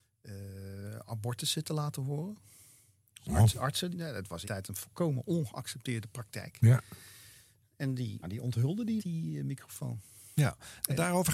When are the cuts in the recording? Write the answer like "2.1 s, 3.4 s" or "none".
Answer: 3.9 s, 4.4 s, 8.2 s, 9.0 s